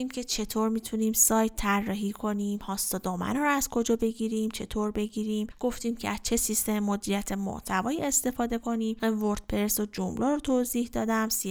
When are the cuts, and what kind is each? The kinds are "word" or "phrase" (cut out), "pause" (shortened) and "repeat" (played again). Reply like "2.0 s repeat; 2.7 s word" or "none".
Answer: 9.0 s word